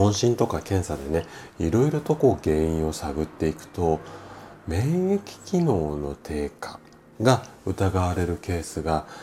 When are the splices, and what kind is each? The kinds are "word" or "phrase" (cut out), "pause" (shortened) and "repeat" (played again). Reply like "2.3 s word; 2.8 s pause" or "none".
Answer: none